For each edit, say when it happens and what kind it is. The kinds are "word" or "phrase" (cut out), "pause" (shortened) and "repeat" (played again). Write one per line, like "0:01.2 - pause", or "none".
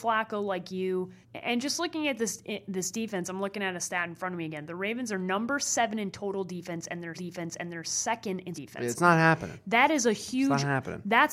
0:01.2 - pause
0:07.1 - repeat
0:08.5 - word